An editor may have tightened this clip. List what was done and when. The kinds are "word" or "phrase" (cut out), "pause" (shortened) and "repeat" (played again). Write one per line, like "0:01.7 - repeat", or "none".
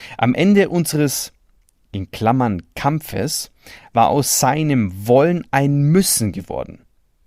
none